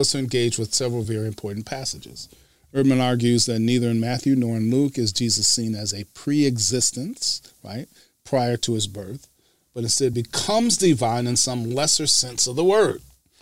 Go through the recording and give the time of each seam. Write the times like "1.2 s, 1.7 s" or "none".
none